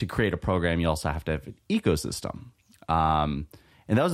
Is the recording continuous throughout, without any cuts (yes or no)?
yes